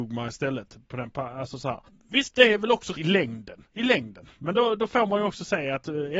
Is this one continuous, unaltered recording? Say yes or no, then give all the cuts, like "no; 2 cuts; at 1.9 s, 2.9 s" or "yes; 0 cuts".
no; 3 cuts; at 1.9 s, 2.9 s, 3.7 s